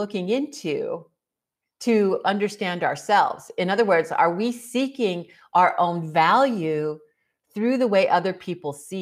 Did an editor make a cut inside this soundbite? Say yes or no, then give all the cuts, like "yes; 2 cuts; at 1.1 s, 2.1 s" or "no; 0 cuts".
no; 0 cuts